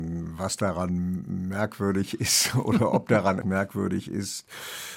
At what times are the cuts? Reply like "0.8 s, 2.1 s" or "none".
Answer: 3.4 s